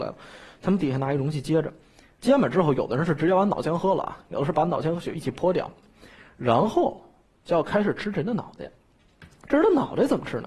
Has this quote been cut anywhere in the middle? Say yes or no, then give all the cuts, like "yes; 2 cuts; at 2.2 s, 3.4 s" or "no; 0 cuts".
no; 0 cuts